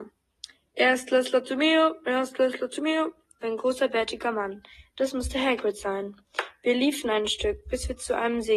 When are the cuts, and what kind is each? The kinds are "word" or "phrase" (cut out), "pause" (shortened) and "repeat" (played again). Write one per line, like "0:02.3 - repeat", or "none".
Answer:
0:03.4 - word